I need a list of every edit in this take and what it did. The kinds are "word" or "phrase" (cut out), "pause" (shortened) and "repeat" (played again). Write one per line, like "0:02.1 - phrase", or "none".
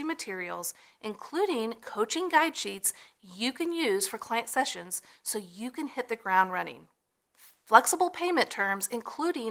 none